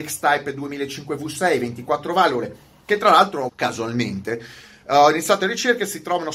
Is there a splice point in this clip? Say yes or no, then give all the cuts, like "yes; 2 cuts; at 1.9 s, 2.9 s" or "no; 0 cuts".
yes; 1 cut; at 3.5 s